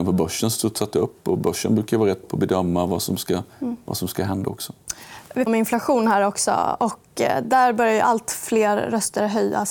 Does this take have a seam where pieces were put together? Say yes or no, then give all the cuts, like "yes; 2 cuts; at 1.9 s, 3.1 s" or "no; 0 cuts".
yes; 3 cuts; at 2.2 s, 3.5 s, 5.5 s